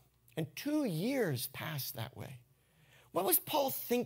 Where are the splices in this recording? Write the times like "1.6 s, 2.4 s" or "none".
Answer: none